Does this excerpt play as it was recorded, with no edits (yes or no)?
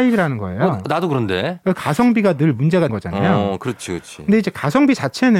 no